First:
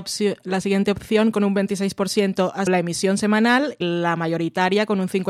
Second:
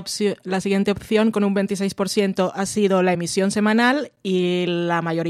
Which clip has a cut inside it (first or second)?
first